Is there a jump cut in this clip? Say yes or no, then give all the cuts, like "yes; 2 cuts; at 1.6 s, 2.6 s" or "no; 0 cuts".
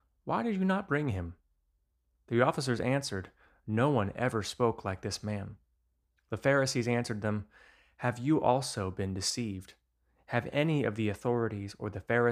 no; 0 cuts